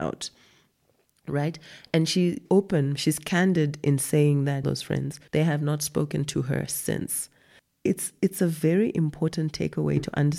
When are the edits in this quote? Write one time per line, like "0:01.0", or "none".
0:02.5
0:04.6
0:05.3